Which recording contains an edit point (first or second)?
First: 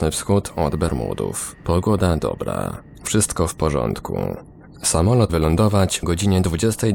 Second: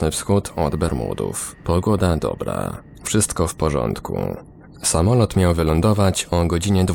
first